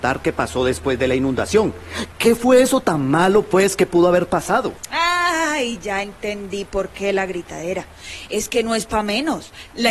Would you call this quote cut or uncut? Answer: uncut